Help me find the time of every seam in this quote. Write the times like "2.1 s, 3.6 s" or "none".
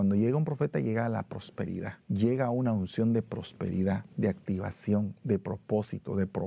2.0 s, 4.1 s